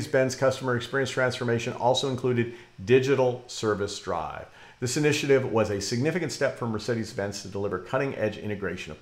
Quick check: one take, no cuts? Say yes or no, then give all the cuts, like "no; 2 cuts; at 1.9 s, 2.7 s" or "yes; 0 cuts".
yes; 0 cuts